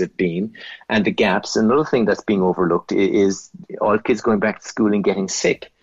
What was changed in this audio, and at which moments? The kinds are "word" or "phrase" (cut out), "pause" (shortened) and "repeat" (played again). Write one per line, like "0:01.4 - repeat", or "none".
none